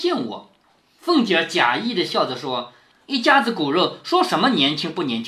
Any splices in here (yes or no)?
no